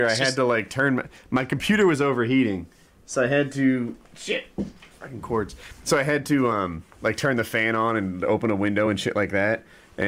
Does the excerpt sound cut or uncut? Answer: uncut